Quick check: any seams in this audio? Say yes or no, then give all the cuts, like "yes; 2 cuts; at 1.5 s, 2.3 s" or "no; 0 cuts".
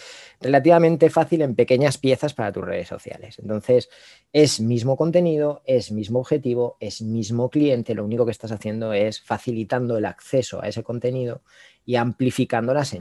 no; 0 cuts